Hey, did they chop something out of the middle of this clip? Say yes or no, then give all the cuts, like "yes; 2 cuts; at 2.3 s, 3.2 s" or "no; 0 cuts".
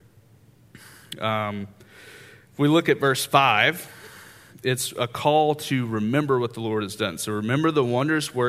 no; 0 cuts